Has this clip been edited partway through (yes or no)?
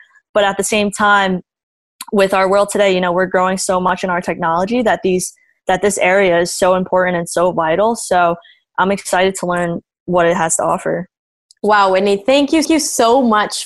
yes